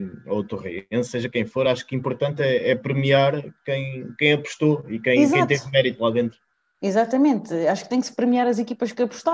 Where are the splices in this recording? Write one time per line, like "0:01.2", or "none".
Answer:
none